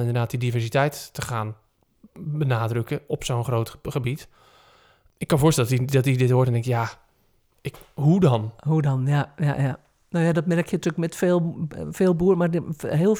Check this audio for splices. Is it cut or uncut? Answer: uncut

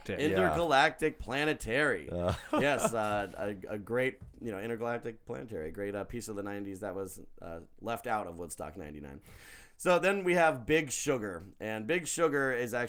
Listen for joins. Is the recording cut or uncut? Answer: uncut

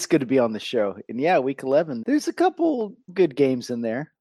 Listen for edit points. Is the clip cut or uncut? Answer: cut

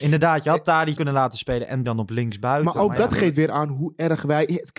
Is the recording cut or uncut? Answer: cut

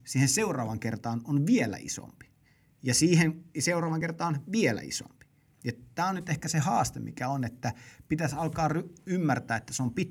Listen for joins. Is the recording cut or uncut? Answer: uncut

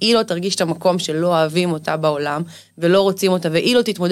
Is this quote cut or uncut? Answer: uncut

